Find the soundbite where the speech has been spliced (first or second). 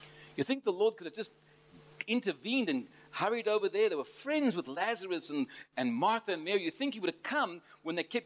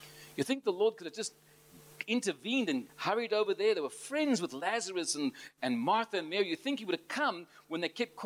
second